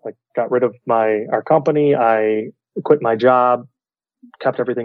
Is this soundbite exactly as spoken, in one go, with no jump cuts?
yes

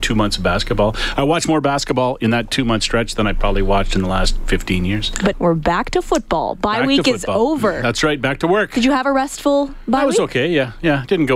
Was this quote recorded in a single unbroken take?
no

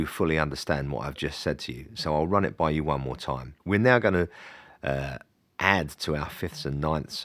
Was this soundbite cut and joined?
yes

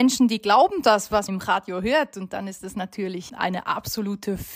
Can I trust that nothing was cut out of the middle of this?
no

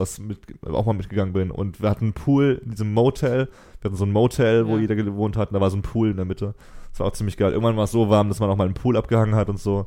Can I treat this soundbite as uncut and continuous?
yes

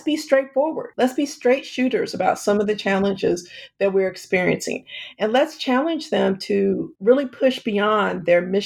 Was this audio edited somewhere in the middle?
yes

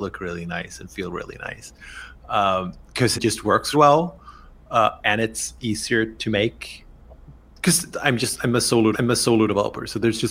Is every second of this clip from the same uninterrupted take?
no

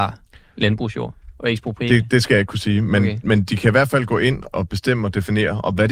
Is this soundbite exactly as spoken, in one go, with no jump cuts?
no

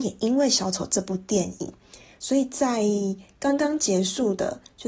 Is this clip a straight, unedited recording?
yes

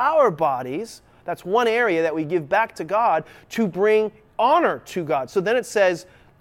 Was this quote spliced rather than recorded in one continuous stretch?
no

